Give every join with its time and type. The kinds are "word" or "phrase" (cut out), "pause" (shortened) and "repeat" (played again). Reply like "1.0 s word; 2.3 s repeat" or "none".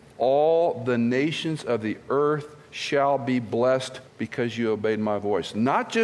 4.1 s pause